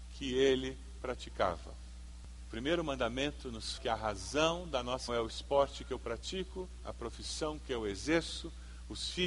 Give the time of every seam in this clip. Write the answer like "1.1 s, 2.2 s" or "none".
3.8 s, 5.1 s

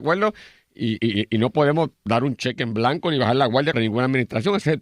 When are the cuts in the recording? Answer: 1.0 s, 1.9 s, 3.7 s

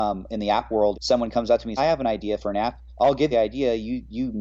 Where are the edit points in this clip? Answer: 0.9 s, 1.8 s, 2.9 s, 3.3 s

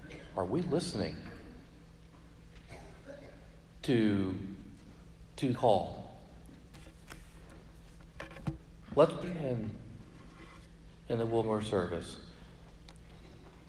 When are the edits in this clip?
5.5 s, 9.2 s, 11.4 s

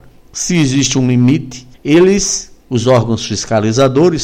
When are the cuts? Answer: 1.7 s

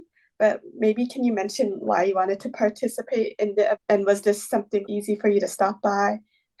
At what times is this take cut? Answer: 3.7 s, 4.8 s

